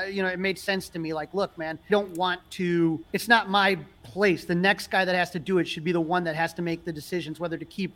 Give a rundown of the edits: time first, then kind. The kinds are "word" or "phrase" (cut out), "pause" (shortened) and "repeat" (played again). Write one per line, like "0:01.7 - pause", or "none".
0:01.9 - phrase
0:03.1 - pause

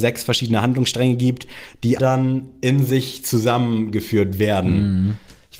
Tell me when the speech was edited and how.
0:02.0 - word

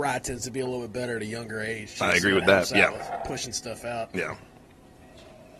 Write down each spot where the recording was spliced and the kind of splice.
none

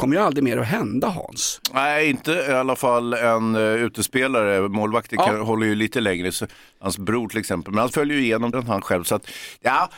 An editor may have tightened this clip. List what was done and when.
0:07.9 - word
0:08.5 - word

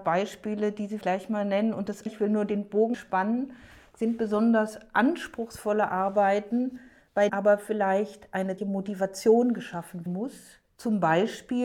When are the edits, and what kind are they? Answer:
0:01.0 - word
0:02.1 - word
0:02.9 - word
0:07.3 - word
0:08.6 - word
0:10.1 - word

